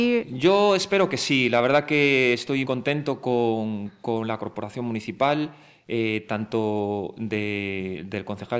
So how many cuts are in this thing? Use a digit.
1